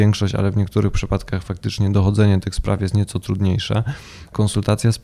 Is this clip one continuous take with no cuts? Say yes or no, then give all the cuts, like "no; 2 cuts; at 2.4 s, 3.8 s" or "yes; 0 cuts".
yes; 0 cuts